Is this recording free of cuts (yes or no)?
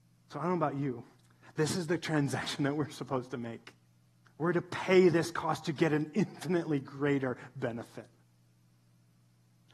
no